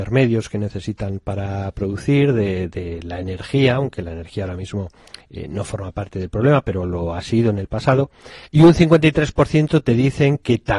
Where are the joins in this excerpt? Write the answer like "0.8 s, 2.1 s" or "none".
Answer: 8.5 s